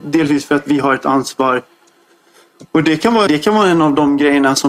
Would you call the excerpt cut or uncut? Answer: cut